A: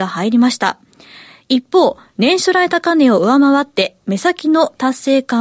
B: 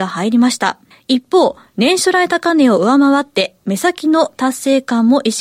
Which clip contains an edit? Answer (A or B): B